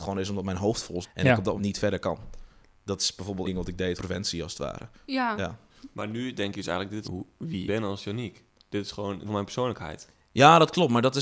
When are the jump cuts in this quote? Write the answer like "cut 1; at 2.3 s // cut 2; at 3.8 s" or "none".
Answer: cut 1; at 1.0 s // cut 2; at 1.6 s // cut 3; at 3.4 s // cut 4; at 4.0 s // cut 5; at 7.0 s // cut 6; at 7.7 s // cut 7; at 9.3 s